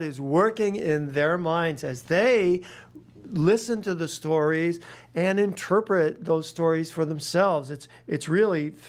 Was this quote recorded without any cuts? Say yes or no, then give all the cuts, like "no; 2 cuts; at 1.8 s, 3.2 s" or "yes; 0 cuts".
yes; 0 cuts